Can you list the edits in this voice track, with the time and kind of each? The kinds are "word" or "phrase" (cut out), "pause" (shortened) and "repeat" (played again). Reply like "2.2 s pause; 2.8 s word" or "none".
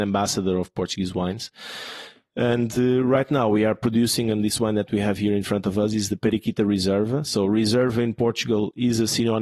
none